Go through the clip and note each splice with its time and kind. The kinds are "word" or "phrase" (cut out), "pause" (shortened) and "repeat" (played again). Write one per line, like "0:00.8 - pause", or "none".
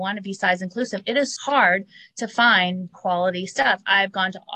0:01.4 - word
0:02.9 - word